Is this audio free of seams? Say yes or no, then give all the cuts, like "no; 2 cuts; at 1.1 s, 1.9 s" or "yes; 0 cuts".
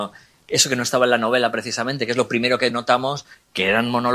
yes; 0 cuts